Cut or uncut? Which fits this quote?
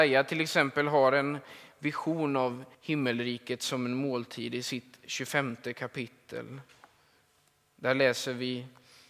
cut